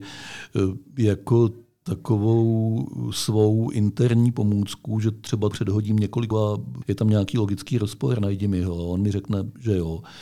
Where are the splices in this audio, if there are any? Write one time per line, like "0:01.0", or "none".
0:05.5
0:06.3
0:06.8